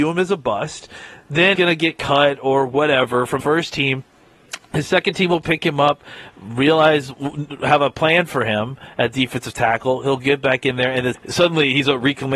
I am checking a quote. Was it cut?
yes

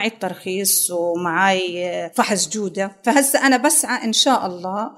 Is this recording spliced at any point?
no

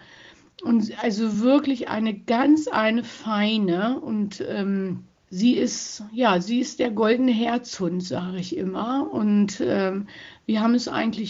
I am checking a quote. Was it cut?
no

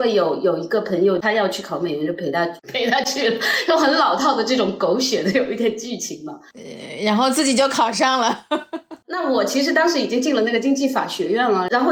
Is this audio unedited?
no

